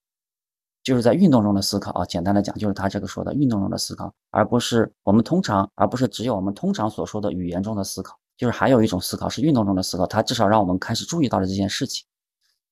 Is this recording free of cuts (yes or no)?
no